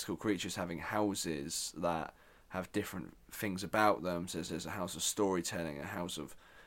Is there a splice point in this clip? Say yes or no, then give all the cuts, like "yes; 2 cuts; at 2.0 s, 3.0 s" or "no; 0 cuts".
yes; 1 cut; at 4.5 s